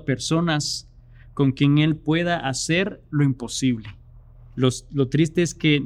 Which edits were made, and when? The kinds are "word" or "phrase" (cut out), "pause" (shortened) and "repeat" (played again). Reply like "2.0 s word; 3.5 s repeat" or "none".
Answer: 4.5 s pause